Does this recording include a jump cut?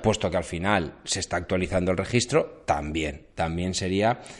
no; 0 cuts

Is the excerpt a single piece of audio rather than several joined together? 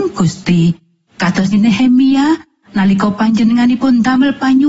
no; 1 cut; at 1.5 s

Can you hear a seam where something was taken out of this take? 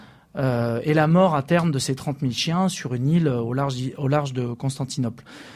no; 0 cuts

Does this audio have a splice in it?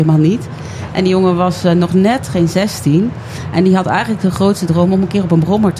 no; 0 cuts

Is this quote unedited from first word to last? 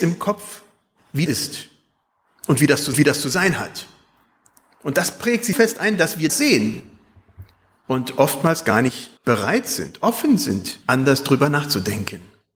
no; 6 cuts; at 1.3 s, 2.9 s, 5.5 s, 6.3 s, 9.2 s, 10.8 s

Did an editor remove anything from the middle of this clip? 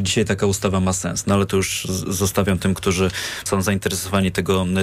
yes; 1 cut; at 3.5 s

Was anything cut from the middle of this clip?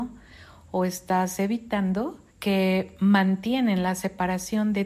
yes; 1 cut; at 2.3 s

